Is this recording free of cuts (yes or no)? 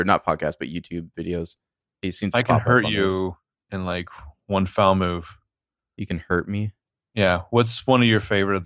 yes